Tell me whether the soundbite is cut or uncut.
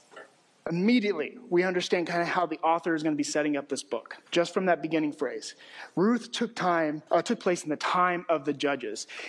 cut